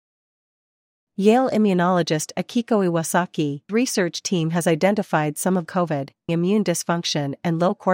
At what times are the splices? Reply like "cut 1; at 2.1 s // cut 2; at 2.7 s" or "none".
cut 1; at 3.7 s // cut 2; at 5.7 s // cut 3; at 6.3 s